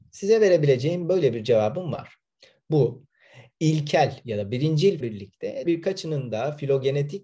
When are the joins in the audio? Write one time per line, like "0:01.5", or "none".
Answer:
0:05.0
0:05.7